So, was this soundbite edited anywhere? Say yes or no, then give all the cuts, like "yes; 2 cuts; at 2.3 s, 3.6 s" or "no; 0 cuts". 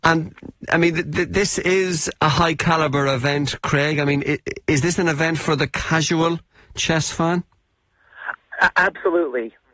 no; 0 cuts